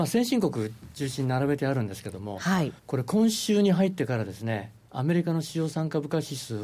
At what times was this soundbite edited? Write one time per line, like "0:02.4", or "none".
0:02.8